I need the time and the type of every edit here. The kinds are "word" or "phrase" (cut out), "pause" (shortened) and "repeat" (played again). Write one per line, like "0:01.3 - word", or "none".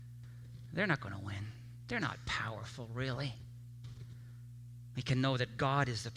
none